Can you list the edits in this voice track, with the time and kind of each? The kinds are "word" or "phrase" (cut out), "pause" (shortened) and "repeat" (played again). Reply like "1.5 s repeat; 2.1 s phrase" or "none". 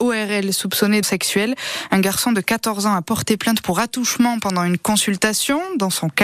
1.0 s word

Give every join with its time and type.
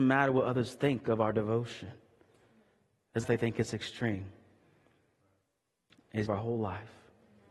3.2 s word; 6.3 s phrase

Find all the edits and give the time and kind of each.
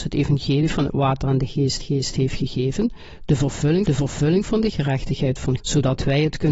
1.8 s repeat; 3.9 s repeat; 5.6 s word

